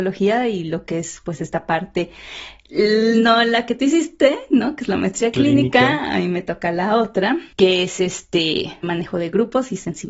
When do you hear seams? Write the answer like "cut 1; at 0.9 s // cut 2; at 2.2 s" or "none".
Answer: cut 1; at 7.5 s // cut 2; at 8.8 s